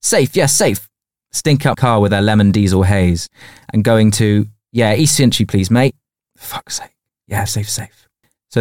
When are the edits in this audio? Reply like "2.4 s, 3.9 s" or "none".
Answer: 1.7 s, 7.5 s

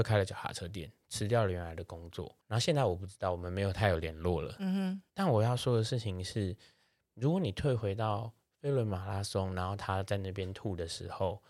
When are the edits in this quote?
2.4 s, 5.1 s

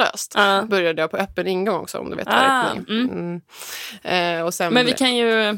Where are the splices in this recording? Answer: none

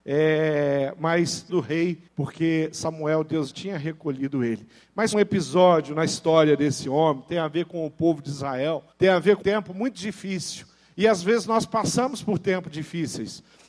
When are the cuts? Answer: 1.5 s, 2.1 s, 3.5 s, 5.1 s, 8.9 s, 9.4 s

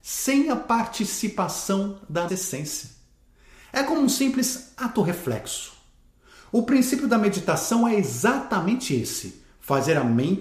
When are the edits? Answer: 2.3 s

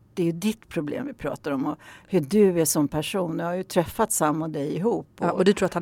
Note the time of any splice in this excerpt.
none

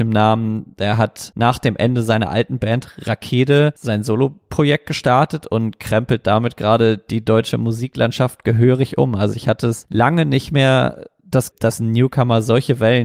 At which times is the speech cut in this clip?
11.5 s

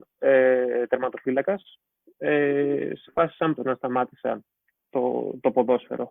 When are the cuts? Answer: 2.0 s, 3.1 s, 3.6 s, 4.9 s

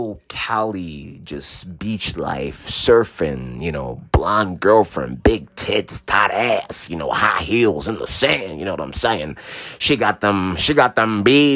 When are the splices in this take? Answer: none

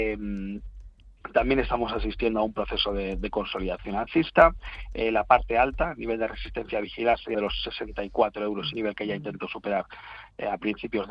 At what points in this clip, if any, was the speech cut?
7.3 s, 8.7 s

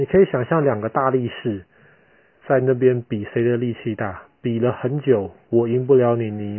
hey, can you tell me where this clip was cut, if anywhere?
2.4 s

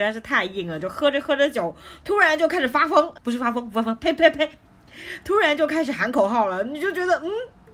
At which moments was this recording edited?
3.2 s

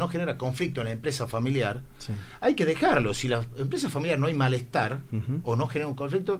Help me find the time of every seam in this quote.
none

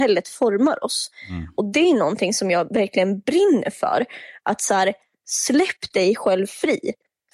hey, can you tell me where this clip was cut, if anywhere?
none

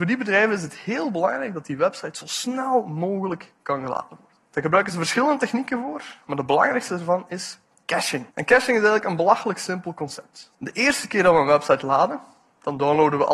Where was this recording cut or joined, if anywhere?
4.4 s, 8.3 s, 10.5 s

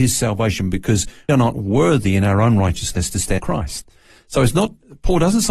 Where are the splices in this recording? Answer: 1.3 s, 3.4 s

